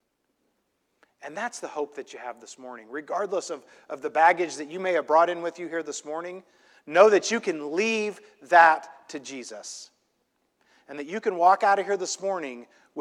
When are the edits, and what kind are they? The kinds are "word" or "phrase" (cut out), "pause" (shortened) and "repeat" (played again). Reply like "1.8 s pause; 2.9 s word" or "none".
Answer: none